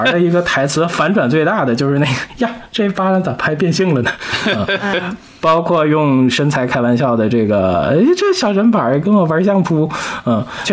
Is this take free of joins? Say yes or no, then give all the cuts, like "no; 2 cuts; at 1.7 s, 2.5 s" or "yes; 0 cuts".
yes; 0 cuts